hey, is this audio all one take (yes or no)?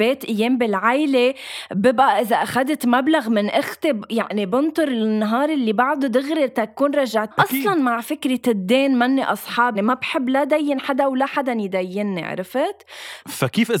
no